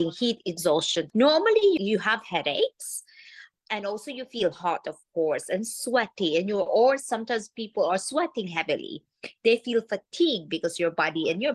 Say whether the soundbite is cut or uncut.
uncut